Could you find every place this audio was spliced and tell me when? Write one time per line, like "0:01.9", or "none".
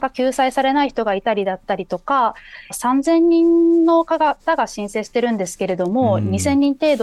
0:02.7